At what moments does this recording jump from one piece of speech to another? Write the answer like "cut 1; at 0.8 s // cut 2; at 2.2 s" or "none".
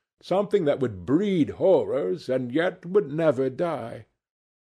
none